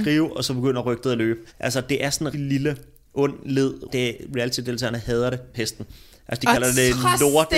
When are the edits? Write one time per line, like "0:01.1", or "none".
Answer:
0:01.5
0:02.3
0:03.9
0:05.5

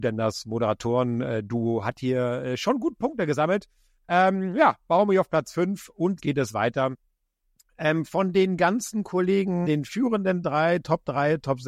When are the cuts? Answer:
0:06.2
0:09.6

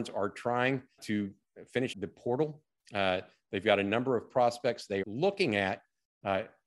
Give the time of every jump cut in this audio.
0:01.0
0:01.9
0:05.0

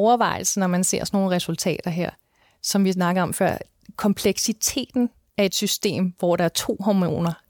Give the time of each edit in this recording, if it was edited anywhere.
none

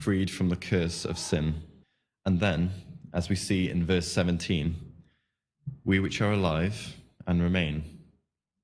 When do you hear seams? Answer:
0:01.8

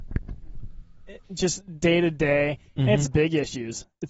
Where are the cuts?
0:01.2
0:03.1

